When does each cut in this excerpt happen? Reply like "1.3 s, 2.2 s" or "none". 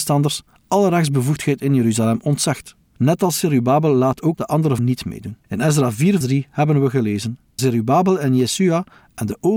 2.9 s, 4.3 s, 4.8 s, 5.4 s, 6.2 s, 7.6 s